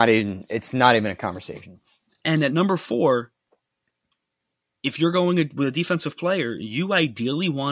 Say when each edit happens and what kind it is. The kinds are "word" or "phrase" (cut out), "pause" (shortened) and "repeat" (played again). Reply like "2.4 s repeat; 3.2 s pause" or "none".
none